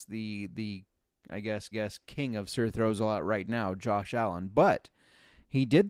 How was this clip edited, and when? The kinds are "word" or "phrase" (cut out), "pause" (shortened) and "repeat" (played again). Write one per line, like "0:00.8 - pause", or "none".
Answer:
0:01.7 - repeat